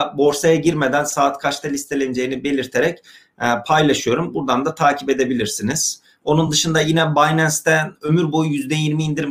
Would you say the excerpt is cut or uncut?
uncut